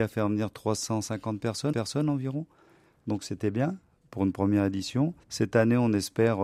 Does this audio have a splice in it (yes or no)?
yes